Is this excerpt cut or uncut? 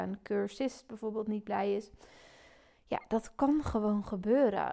uncut